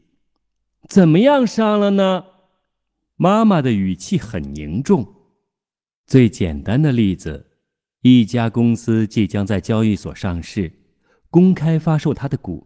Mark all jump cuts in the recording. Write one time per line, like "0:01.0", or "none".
none